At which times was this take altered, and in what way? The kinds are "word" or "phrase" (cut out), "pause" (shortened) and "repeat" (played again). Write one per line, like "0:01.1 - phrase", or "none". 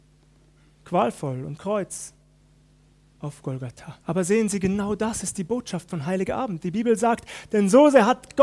0:01.6 - phrase
0:04.0 - pause